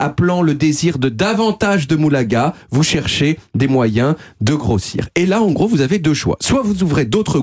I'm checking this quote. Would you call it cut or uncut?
uncut